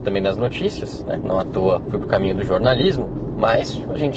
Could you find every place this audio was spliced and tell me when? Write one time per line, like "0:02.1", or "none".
none